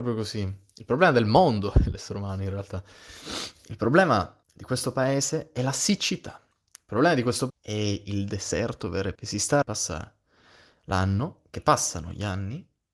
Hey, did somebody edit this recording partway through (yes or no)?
yes